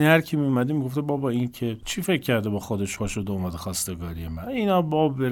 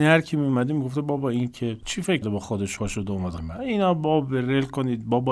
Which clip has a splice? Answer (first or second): second